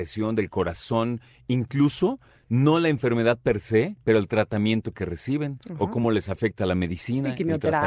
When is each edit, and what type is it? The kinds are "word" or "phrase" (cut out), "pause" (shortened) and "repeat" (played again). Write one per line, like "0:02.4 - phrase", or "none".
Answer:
none